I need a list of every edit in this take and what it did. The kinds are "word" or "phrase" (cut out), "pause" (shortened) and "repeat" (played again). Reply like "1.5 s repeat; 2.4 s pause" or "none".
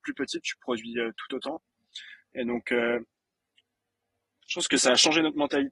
none